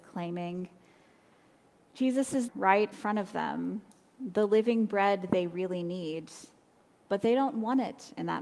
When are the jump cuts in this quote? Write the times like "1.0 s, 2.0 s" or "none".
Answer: 2.5 s, 2.9 s